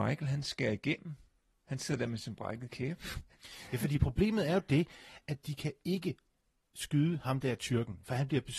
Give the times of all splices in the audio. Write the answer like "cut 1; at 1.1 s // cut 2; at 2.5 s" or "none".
none